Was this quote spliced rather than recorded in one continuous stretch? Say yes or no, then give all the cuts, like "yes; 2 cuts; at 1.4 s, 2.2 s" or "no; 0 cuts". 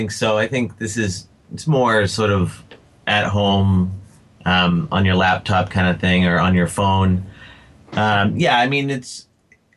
no; 0 cuts